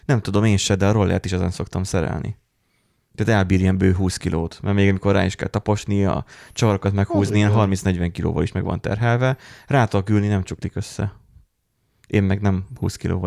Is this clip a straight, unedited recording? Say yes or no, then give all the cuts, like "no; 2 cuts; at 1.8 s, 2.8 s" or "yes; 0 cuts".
yes; 0 cuts